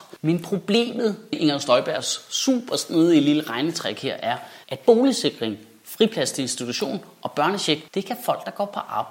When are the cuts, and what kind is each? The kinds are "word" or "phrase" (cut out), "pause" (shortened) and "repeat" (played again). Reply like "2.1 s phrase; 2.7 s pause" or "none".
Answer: 1.3 s word; 4.6 s pause; 7.9 s pause